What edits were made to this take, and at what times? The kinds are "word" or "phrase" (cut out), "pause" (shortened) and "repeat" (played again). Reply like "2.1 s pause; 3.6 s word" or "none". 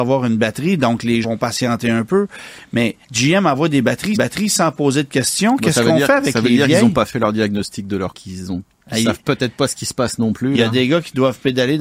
1.2 s word; 3.0 s pause; 4.1 s repeat; 8.1 s word